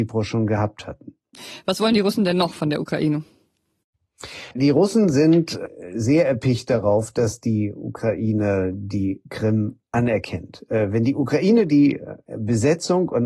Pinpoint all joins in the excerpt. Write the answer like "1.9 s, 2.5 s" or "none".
4.5 s